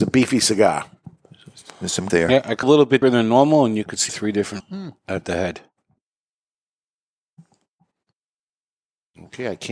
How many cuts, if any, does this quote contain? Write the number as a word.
five